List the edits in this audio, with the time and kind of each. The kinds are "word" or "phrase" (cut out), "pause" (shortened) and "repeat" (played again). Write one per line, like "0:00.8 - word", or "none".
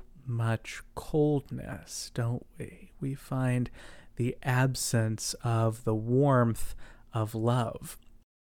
none